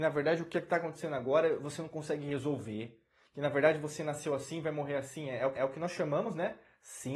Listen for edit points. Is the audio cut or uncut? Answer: cut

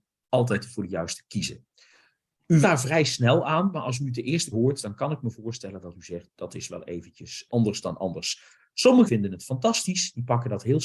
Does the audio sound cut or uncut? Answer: cut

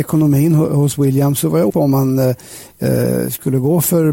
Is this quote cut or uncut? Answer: cut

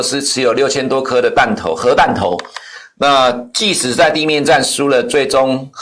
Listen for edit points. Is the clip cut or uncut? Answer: uncut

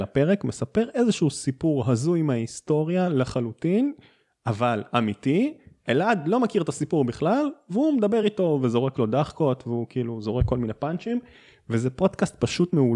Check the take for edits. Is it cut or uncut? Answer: uncut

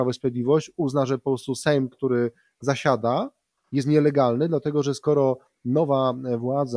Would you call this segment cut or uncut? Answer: uncut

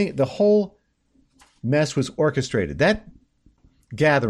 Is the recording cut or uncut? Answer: uncut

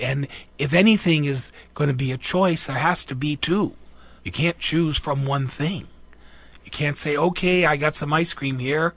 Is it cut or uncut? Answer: cut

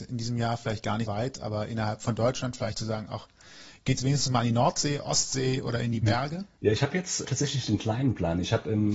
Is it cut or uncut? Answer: cut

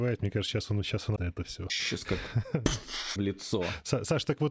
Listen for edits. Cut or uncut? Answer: cut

